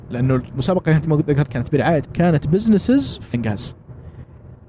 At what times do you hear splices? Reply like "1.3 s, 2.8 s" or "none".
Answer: 1.1 s, 1.5 s, 2.0 s, 3.3 s